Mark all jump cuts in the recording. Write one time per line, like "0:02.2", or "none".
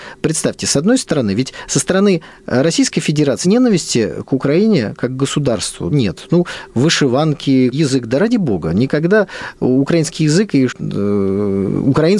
0:03.4
0:05.9
0:07.7
0:10.7